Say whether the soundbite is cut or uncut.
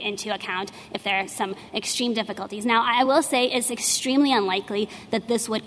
uncut